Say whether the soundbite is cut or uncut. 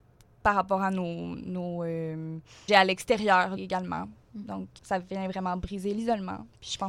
cut